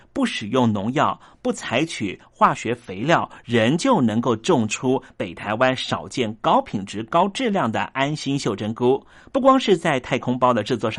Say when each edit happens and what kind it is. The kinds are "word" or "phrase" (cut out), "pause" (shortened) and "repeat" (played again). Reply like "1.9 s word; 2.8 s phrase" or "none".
9.2 s pause